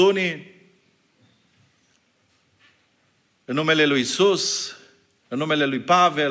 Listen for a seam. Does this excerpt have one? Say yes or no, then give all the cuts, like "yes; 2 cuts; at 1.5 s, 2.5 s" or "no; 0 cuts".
no; 0 cuts